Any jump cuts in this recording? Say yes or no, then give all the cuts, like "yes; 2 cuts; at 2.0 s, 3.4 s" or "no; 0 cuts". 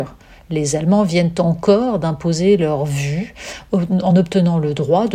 no; 0 cuts